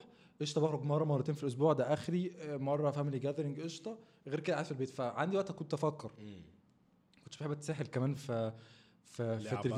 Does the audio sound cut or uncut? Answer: uncut